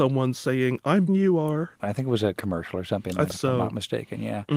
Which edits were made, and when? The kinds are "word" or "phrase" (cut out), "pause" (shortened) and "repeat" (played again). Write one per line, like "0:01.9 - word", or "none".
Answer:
0:01.1 - phrase
0:01.8 - pause
0:02.4 - word
0:03.3 - word